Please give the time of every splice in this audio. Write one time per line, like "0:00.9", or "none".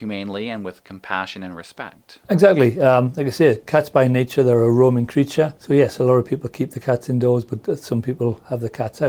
0:02.2
0:05.6

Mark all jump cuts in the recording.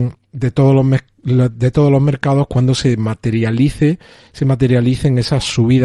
none

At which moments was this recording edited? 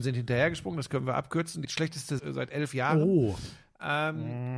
0:01.6
0:02.2

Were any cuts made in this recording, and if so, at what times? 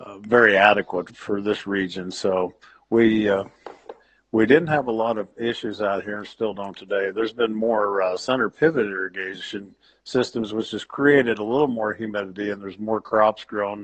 none

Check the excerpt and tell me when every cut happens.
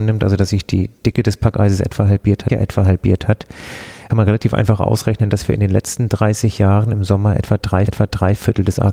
0:02.5
0:04.1
0:07.9

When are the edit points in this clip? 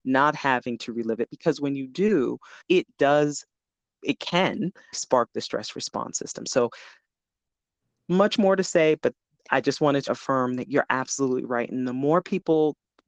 0:02.6
0:04.9
0:09.3
0:10.1

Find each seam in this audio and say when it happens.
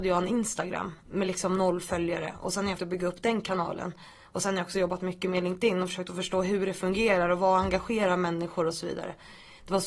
0:02.8

